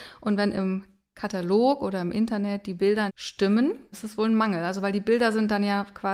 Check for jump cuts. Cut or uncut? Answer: cut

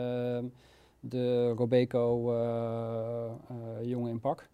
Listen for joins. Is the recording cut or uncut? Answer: uncut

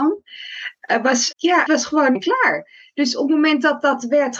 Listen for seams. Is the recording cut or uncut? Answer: cut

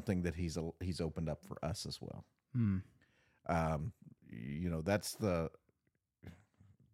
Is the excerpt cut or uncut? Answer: uncut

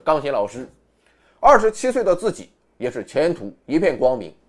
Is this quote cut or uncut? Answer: uncut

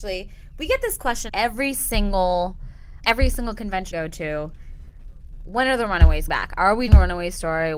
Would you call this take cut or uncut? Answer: cut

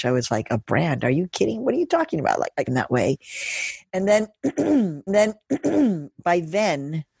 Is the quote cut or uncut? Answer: cut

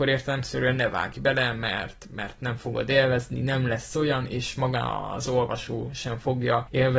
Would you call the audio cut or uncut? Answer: uncut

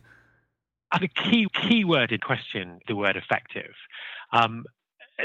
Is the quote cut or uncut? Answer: cut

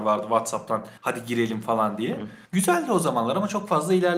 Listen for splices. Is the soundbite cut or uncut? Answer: cut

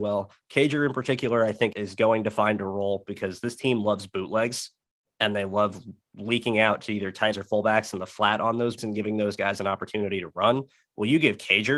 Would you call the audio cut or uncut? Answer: cut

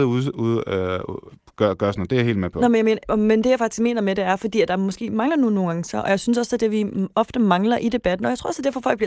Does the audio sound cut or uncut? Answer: uncut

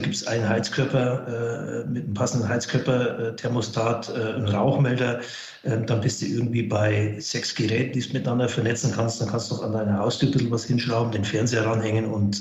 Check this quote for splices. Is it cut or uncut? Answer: uncut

